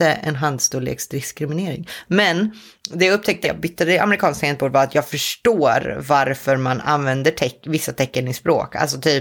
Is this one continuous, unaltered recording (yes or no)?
no